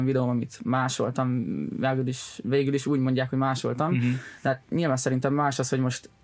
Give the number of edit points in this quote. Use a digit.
0